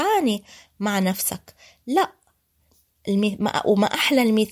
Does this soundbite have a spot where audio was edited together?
no; 0 cuts

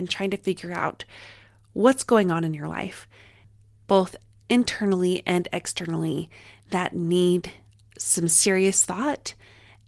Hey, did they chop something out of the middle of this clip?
no; 0 cuts

